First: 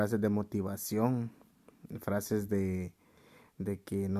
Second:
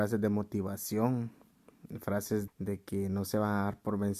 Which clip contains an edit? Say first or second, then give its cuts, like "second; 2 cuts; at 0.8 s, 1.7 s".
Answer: second; 1 cut; at 2.5 s